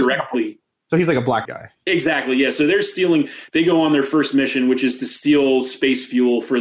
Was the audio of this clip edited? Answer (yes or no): yes